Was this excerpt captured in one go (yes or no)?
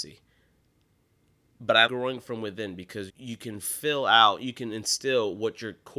no